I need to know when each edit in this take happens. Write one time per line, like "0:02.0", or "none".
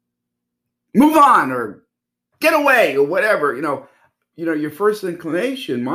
none